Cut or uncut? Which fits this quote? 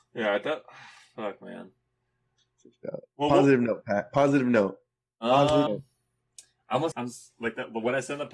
cut